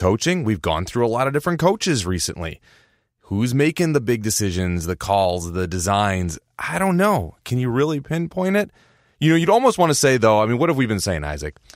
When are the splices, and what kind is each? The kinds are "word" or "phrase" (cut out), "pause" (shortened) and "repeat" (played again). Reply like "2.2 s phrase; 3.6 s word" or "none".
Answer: none